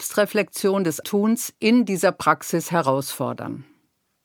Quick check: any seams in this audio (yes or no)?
yes